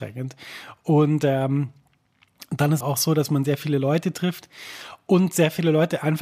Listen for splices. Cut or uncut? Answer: cut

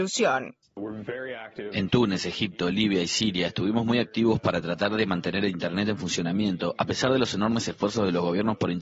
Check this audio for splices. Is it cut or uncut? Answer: uncut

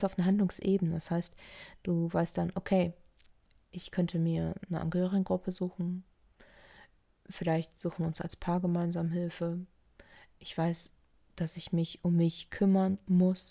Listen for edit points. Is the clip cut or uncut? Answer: uncut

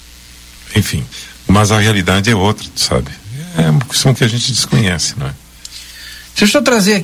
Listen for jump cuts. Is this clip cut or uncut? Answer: cut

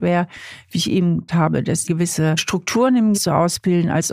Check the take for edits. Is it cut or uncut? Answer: cut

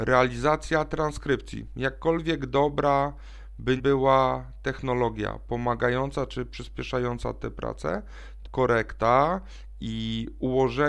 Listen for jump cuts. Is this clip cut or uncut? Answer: cut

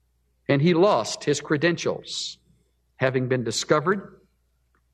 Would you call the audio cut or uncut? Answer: uncut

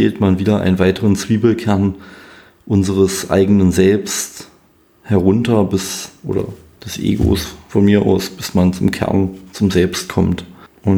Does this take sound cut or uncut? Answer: uncut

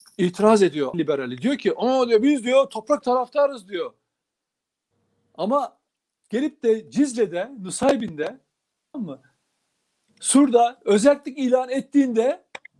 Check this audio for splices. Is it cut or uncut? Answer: cut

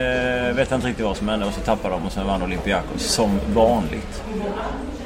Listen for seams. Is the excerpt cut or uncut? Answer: uncut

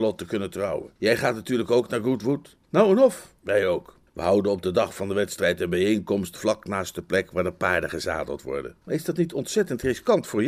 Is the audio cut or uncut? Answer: cut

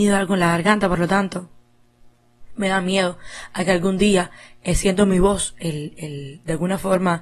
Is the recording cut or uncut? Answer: uncut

